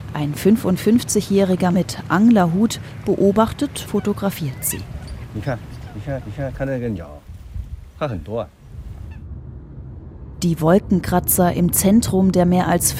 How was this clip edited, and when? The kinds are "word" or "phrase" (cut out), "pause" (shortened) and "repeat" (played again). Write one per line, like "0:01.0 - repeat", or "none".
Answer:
0:01.7 - word
0:03.8 - word
0:06.2 - repeat